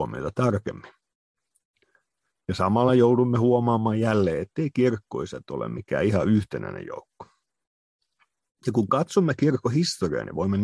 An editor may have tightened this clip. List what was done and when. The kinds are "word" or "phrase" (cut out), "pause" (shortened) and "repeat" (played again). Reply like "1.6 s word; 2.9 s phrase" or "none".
none